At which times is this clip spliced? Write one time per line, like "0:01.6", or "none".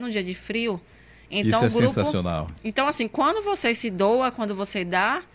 none